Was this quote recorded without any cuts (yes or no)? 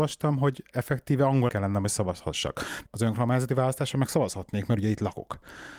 no